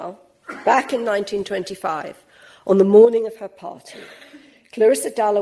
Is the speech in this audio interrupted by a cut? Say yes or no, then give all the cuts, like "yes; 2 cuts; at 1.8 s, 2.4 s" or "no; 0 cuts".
no; 0 cuts